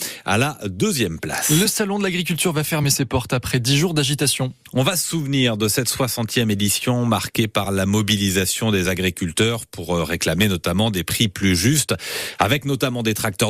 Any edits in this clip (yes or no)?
no